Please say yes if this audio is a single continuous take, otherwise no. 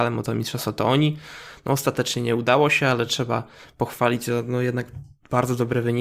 yes